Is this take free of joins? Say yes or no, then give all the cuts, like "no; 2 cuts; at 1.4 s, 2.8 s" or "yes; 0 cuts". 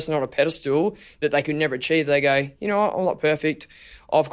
yes; 0 cuts